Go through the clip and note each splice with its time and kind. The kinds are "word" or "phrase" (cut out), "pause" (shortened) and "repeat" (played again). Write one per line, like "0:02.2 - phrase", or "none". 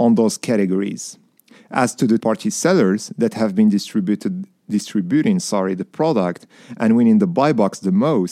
0:02.2 - word